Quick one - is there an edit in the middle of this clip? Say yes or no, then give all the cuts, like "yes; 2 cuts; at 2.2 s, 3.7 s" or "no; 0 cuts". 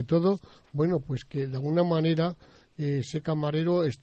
no; 0 cuts